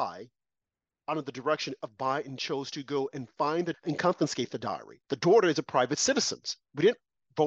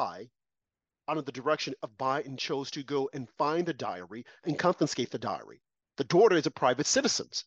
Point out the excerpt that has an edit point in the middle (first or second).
first